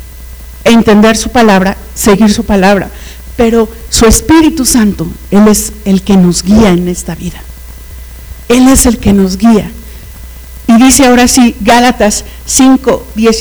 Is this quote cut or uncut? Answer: uncut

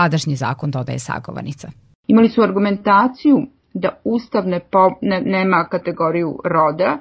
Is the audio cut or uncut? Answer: uncut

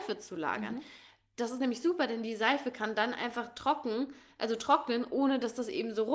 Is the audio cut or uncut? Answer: uncut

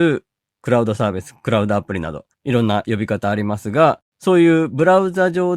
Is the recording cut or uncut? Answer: cut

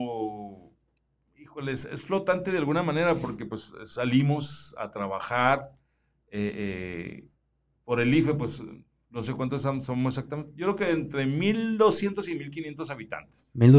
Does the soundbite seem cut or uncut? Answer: uncut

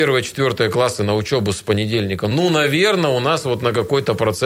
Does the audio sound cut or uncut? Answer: uncut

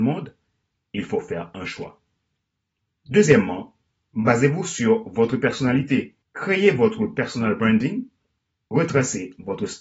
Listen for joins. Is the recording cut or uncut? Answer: cut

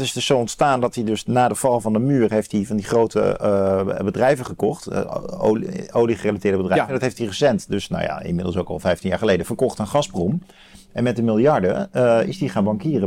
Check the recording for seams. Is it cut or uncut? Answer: uncut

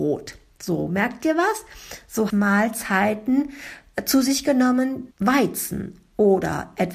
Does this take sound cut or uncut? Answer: cut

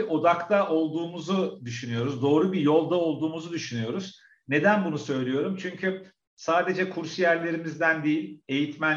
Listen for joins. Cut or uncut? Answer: uncut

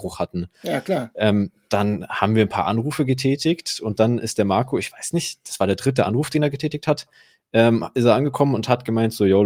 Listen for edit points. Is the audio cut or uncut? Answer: uncut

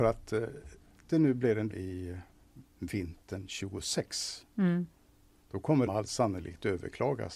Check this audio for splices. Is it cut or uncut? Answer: cut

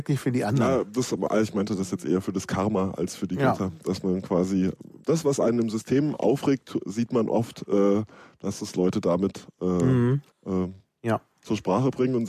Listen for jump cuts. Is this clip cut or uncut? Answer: cut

